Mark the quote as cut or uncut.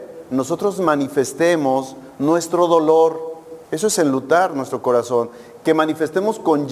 cut